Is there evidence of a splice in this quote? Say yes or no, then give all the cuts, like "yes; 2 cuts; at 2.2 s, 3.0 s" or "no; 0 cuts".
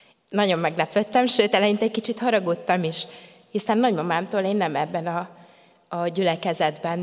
no; 0 cuts